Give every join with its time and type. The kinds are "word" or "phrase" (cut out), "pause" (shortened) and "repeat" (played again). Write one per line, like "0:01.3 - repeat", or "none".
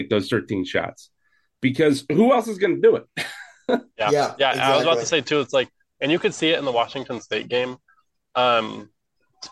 none